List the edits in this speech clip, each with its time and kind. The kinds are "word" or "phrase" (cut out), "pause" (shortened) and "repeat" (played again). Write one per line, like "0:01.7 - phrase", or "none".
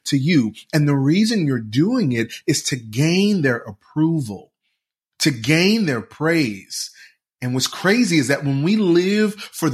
none